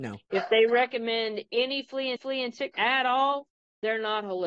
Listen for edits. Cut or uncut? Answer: cut